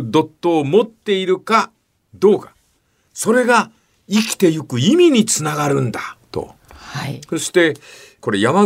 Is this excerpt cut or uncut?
uncut